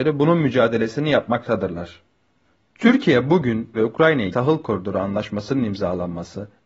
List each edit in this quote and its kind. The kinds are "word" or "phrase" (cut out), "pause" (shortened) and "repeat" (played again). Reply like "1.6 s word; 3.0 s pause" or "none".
3.7 s word; 4.3 s word